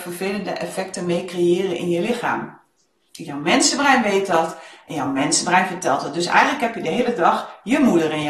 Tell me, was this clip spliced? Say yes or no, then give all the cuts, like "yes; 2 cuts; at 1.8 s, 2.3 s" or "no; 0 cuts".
no; 0 cuts